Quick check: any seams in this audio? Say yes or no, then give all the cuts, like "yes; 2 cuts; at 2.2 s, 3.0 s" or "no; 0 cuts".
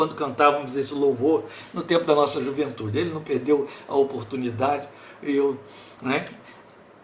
no; 0 cuts